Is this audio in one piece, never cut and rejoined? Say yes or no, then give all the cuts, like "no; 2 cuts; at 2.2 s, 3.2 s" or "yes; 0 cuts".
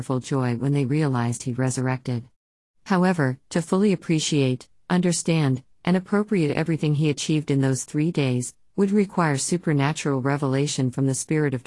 yes; 0 cuts